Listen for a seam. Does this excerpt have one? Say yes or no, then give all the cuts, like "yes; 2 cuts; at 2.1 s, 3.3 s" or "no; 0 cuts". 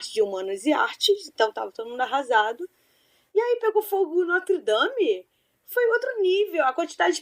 no; 0 cuts